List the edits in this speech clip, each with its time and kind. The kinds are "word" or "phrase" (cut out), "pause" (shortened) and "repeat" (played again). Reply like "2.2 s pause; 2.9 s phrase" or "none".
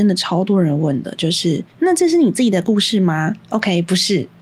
1.7 s pause; 3.4 s pause